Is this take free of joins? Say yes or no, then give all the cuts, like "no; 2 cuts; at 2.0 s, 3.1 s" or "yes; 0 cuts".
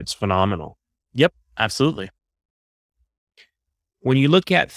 yes; 0 cuts